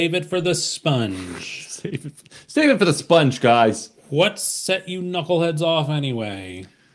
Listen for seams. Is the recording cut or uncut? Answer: uncut